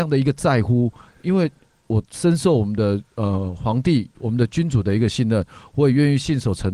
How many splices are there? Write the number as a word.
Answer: zero